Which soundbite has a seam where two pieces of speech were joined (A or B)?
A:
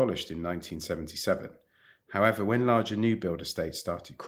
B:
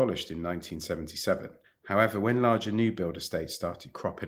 B